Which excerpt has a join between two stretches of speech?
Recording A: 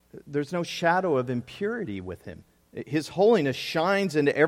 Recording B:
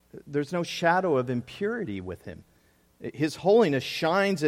A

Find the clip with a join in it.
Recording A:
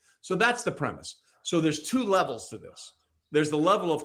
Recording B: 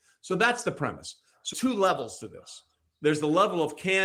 B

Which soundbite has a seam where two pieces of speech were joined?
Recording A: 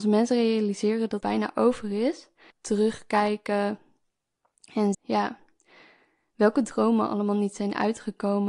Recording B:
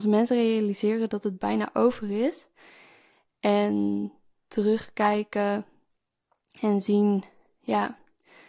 A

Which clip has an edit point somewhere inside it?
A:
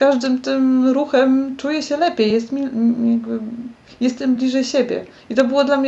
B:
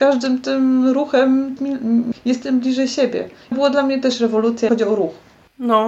B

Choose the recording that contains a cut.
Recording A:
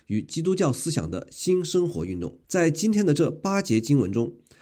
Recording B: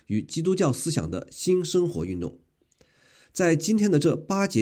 A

